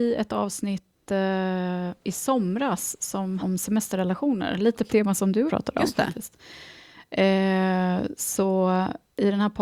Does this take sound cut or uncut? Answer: cut